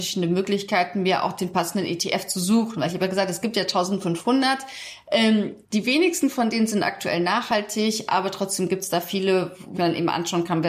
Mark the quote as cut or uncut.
cut